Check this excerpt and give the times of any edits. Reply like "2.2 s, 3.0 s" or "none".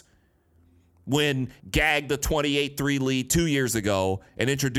1.6 s